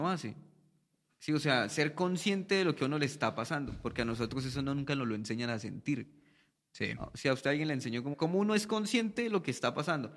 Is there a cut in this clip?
yes; 1 cut; at 8.1 s

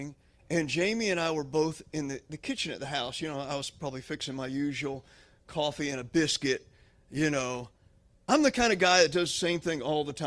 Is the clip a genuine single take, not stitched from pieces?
yes; 0 cuts

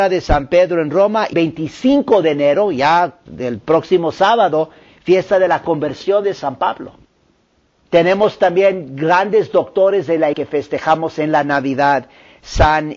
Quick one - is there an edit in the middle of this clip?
yes; 2 cuts; at 1.3 s, 10.3 s

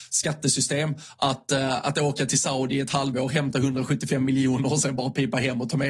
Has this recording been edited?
no; 0 cuts

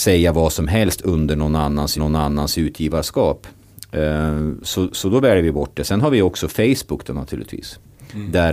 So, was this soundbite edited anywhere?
yes; 1 cut; at 2.0 s

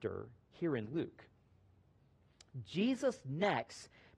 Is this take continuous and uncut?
yes; 0 cuts

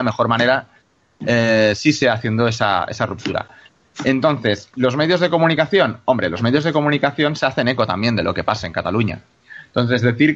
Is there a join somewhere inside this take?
no; 0 cuts

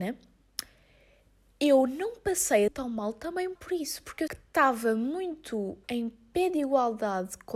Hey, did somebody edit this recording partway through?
yes; 4 cuts; at 2.7 s, 3.6 s, 4.3 s, 5.8 s

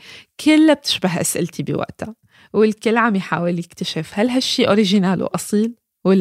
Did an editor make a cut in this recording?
no; 0 cuts

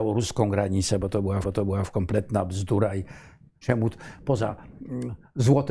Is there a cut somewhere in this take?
yes; 2 cuts; at 1.4 s, 3.6 s

